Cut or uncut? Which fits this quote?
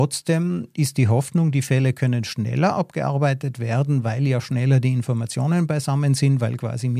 uncut